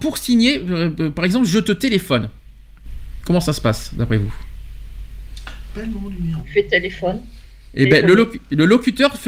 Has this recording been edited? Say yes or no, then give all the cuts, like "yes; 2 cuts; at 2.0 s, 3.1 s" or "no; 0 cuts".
no; 0 cuts